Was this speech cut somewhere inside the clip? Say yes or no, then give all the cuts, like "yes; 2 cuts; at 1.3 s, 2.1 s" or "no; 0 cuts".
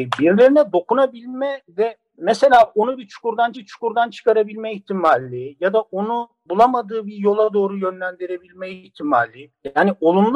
yes; 1 cut; at 3.5 s